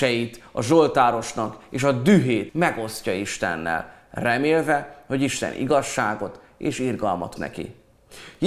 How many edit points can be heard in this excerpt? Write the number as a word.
two